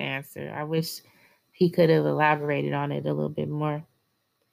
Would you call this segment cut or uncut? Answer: uncut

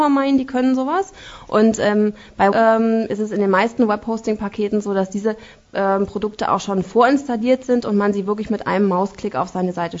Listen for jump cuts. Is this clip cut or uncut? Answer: cut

